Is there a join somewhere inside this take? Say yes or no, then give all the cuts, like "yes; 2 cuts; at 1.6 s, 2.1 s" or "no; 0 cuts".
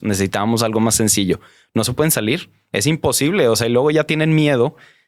no; 0 cuts